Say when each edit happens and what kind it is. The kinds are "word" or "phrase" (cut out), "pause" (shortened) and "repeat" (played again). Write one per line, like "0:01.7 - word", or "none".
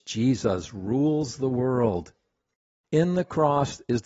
none